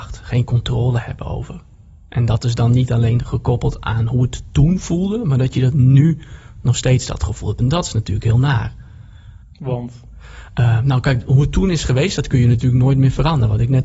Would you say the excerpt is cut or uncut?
cut